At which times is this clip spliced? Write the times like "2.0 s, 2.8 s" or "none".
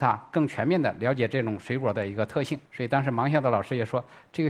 2.7 s